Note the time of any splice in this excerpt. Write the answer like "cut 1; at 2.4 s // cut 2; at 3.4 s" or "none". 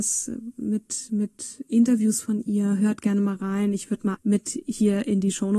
cut 1; at 4.1 s